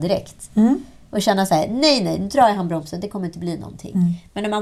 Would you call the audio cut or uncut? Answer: uncut